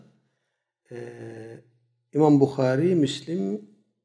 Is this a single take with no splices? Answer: yes; 0 cuts

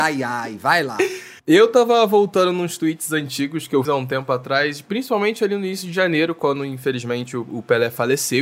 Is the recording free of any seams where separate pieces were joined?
no; 2 cuts; at 1.4 s, 3.8 s

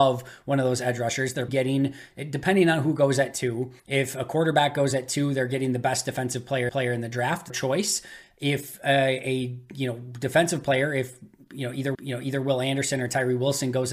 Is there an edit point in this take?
yes; 5 cuts; at 1.5 s, 3.8 s, 6.7 s, 7.5 s, 11.9 s

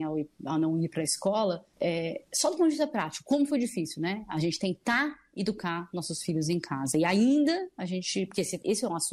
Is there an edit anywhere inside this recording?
yes; 1 cut; at 1.7 s

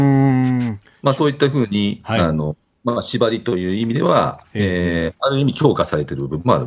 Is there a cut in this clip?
no; 0 cuts

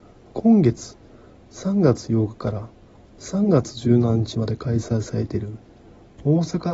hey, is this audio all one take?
yes; 0 cuts

